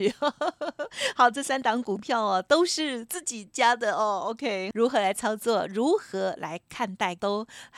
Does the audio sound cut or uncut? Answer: uncut